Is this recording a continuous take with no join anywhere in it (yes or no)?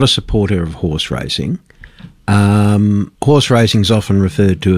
no